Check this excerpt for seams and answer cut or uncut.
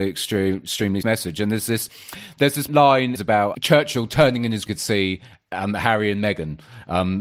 cut